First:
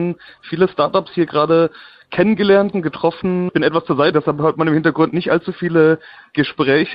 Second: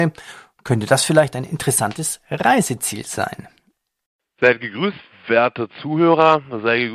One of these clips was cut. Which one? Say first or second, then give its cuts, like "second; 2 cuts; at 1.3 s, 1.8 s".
first; 2 cuts; at 2.7 s, 4.1 s